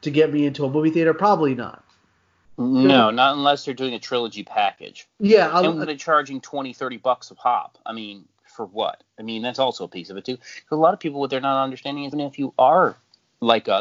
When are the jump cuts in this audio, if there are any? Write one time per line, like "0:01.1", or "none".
0:05.9
0:12.1